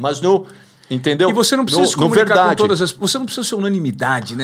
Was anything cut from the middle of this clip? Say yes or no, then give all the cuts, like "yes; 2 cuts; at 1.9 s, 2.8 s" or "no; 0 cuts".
no; 0 cuts